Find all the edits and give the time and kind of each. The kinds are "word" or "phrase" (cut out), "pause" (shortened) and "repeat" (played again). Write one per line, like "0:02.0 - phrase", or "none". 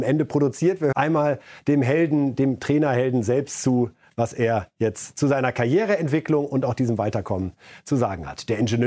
0:00.9 - word